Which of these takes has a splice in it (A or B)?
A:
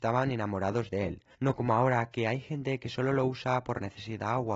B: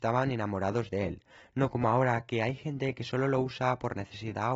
A